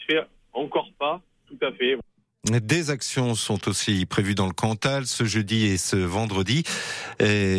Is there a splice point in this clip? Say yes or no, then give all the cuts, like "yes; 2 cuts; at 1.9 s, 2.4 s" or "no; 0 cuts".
no; 0 cuts